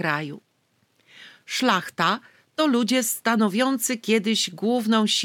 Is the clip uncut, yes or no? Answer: yes